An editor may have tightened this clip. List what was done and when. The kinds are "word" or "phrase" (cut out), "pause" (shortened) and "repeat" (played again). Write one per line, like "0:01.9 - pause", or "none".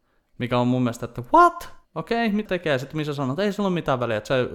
0:01.8 - pause
0:02.5 - word